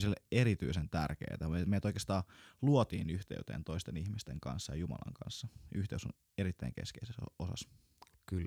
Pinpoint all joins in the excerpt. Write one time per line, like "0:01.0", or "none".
none